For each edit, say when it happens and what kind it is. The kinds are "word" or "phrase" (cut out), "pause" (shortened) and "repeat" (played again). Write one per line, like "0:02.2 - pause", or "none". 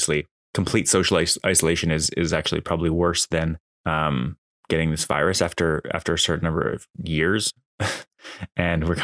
none

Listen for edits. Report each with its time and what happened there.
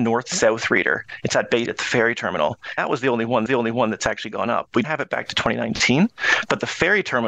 0:01.7 - word
0:02.8 - word
0:03.5 - repeat
0:04.8 - word

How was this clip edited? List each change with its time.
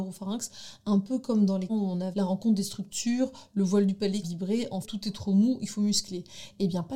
0:01.7 - phrase
0:02.1 - word
0:04.2 - phrase
0:04.8 - word

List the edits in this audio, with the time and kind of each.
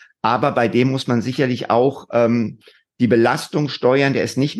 none

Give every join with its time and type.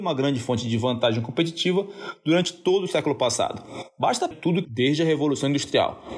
0:04.3 - phrase
0:04.6 - word

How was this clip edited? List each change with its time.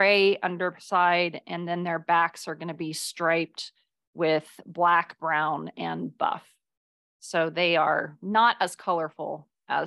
none

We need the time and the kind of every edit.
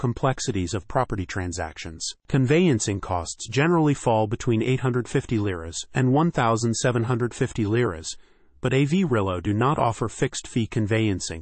none

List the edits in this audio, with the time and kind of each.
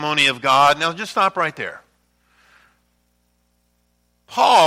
none

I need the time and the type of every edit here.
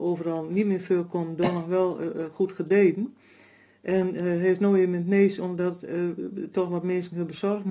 none

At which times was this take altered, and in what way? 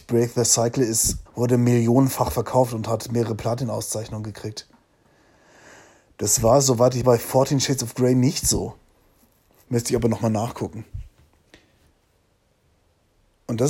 0:01.3 - word
0:07.0 - word

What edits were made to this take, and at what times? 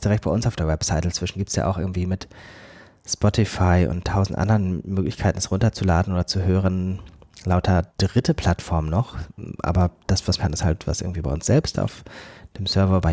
0:07.9 - pause
0:10.4 - phrase

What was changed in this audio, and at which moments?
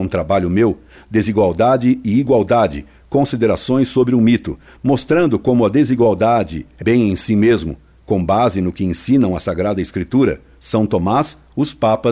0:06.8 - word

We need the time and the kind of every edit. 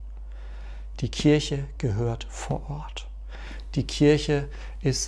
none

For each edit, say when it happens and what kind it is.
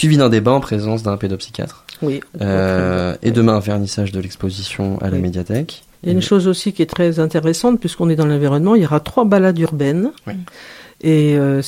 0:05.9 - pause
0:10.2 - pause

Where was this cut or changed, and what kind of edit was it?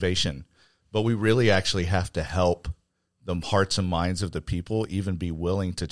none

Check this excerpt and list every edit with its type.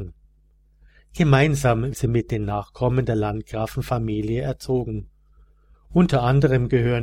0:01.9 - word

